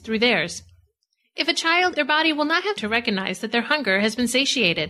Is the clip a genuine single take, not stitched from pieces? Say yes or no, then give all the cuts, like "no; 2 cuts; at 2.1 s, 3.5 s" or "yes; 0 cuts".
no; 2 cuts; at 2.0 s, 2.8 s